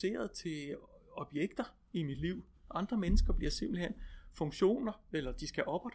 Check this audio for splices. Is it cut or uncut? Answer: uncut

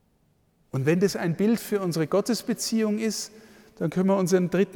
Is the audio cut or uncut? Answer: uncut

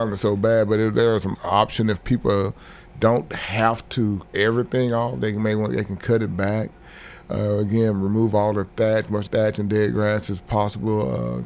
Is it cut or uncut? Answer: cut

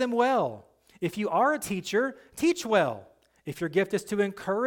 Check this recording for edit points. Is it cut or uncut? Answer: uncut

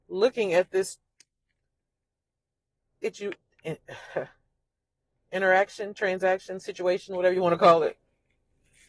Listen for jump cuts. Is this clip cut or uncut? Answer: uncut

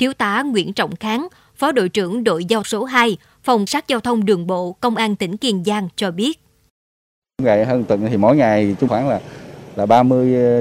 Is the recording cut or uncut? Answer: cut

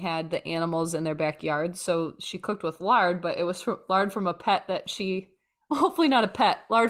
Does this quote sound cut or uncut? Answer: uncut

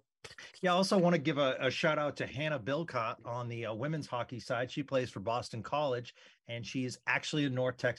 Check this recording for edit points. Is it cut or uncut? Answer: uncut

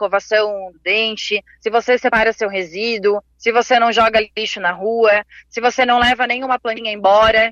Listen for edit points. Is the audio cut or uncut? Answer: cut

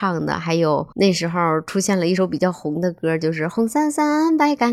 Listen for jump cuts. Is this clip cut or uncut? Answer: cut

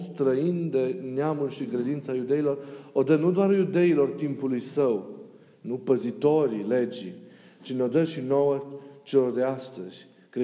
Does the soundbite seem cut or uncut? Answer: uncut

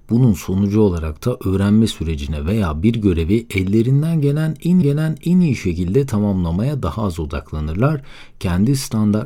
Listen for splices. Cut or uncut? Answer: cut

